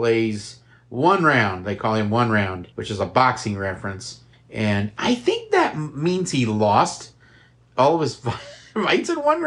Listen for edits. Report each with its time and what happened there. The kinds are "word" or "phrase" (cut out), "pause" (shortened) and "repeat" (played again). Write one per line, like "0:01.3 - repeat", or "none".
0:02.7 - pause
0:04.3 - pause